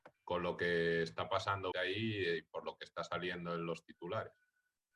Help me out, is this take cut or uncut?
cut